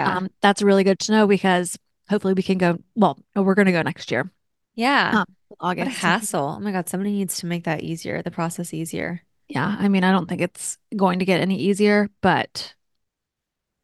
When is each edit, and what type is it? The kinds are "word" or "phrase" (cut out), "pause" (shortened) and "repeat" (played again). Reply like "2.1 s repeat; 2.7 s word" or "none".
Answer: none